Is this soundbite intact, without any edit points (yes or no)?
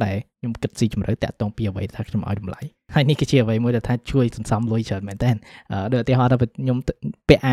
no